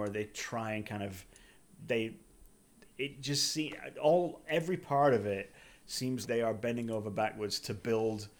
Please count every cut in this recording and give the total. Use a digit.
1